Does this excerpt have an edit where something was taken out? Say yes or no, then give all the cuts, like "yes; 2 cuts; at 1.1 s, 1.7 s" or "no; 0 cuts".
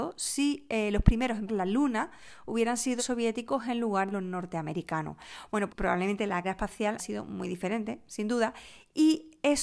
yes; 6 cuts; at 1.5 s, 3.0 s, 4.1 s, 5.7 s, 6.4 s, 7.0 s